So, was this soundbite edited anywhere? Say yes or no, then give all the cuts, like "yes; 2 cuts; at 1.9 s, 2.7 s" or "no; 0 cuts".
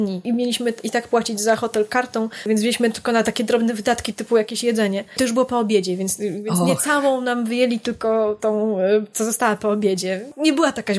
no; 0 cuts